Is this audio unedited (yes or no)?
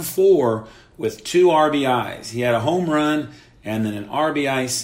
yes